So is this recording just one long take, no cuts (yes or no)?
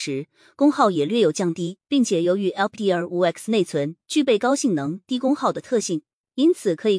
no